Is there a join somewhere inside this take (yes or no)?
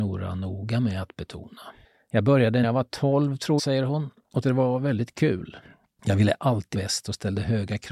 yes